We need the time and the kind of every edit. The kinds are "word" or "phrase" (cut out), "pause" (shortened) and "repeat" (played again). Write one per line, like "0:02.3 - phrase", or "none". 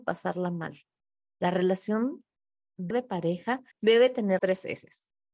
0:02.9 - word
0:03.7 - pause
0:04.4 - word

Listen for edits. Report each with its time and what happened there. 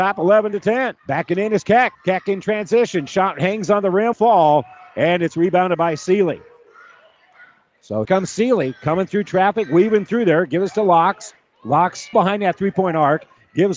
0:01.0 - pause
0:01.9 - pause
0:04.1 - word
0:08.0 - word
0:12.1 - word

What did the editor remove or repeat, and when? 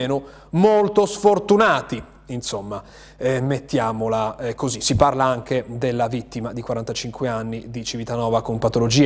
none

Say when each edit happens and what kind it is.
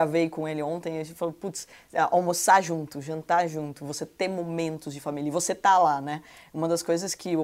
none

